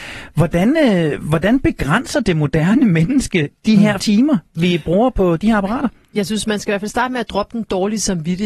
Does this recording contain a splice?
yes; 1 cut; at 4.0 s

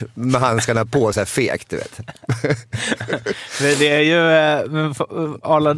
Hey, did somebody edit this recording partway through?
no; 0 cuts

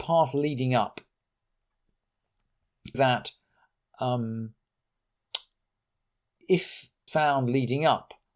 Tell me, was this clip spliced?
yes; 2 cuts; at 2.9 s, 7.1 s

